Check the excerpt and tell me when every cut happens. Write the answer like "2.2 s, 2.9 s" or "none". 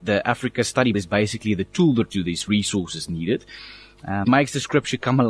0.9 s, 2.1 s, 4.2 s